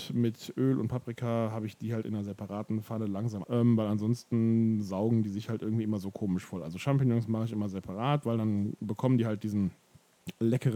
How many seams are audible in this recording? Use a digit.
1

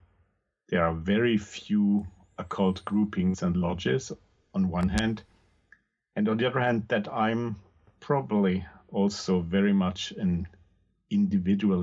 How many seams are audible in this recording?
0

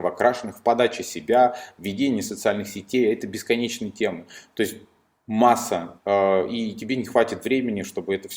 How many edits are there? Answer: 1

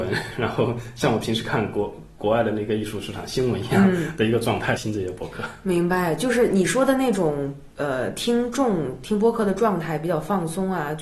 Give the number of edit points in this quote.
1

